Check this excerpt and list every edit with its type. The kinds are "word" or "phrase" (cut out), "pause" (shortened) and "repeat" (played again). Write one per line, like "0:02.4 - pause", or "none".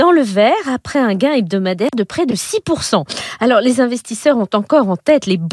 none